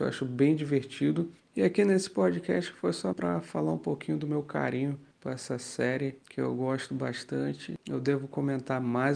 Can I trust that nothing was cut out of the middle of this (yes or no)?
no